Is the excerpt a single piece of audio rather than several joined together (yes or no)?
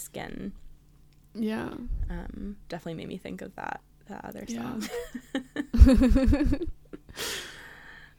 no